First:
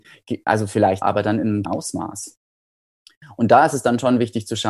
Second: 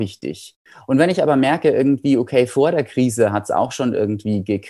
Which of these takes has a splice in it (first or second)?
first